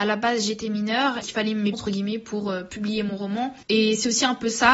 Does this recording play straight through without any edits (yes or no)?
no